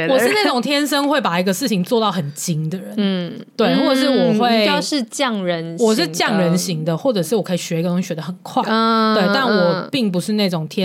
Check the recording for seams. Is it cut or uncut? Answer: uncut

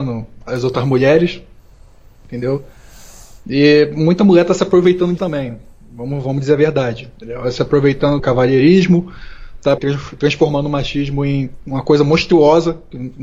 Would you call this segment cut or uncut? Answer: cut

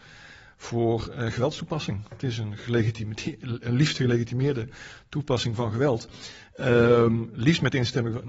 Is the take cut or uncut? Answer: uncut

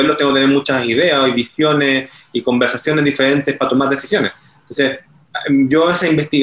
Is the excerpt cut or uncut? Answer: uncut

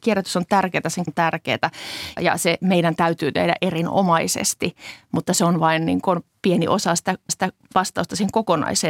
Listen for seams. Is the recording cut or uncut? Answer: cut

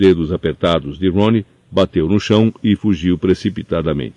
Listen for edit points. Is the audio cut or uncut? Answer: uncut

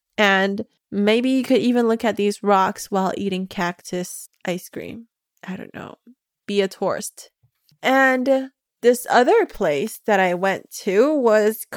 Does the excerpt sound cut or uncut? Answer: uncut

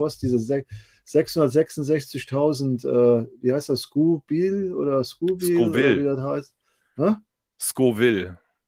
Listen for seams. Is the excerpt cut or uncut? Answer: uncut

